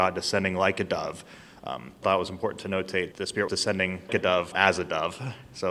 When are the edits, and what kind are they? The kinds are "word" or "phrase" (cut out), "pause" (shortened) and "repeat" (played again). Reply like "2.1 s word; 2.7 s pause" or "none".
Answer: 2.0 s word; 3.1 s word; 3.5 s word; 4.1 s word; 4.5 s word